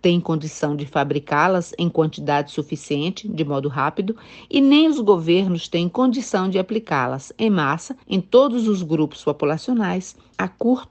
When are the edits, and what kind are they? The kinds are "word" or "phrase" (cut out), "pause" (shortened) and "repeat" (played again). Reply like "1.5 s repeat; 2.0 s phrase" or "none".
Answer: 8.0 s pause